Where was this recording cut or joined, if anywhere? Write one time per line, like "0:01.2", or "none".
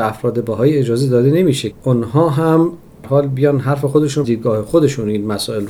0:01.7
0:03.0
0:04.2